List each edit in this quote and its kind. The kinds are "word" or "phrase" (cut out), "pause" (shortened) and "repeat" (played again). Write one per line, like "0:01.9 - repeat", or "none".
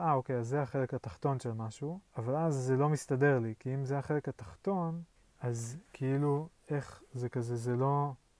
0:02.1 - pause
0:05.1 - pause